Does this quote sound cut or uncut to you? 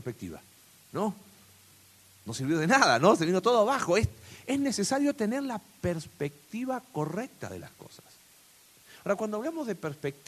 uncut